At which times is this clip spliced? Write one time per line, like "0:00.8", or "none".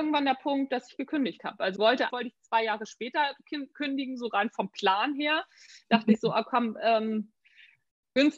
0:01.8
0:02.1